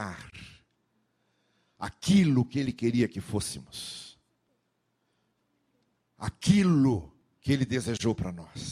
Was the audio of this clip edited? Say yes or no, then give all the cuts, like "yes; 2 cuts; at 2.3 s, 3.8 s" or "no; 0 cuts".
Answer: no; 0 cuts